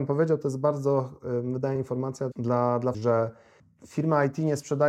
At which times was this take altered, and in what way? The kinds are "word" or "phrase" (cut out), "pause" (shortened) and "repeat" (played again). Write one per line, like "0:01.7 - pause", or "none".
0:01.8 - phrase
0:02.3 - word
0:02.9 - word